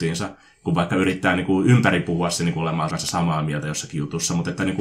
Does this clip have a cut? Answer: yes; 1 cut; at 2.9 s

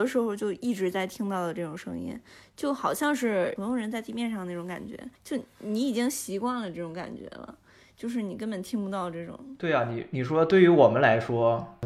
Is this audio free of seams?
no; 1 cut; at 5.1 s

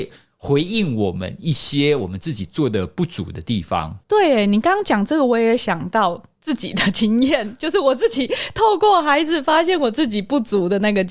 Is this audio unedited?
no; 1 cut; at 4.0 s

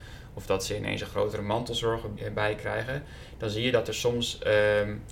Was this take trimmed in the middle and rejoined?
yes; 1 cut; at 2.2 s

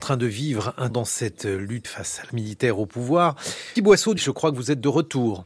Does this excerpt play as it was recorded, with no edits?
no; 5 cuts; at 0.9 s, 1.8 s, 2.3 s, 3.8 s, 4.2 s

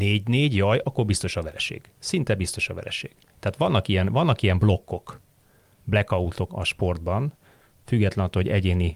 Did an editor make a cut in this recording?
yes; 1 cut; at 6.5 s

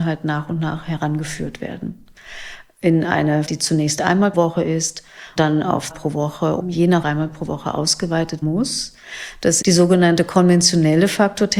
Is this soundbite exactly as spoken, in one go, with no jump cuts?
no; 8 cuts; at 3.5 s, 4.3 s, 5.4 s, 5.9 s, 6.6 s, 7.0 s, 8.4 s, 9.6 s

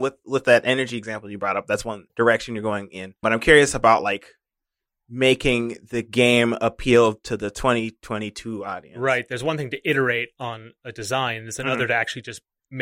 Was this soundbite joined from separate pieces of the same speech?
yes; 2 cuts; at 2.1 s, 3.2 s

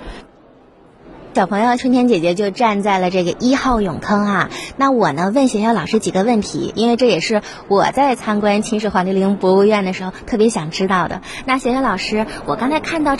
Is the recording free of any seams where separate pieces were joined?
no; 1 cut; at 1.8 s

